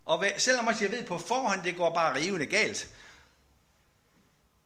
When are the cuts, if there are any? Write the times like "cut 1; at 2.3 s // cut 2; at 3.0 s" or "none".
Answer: none